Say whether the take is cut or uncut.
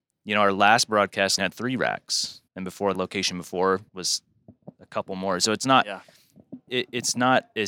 cut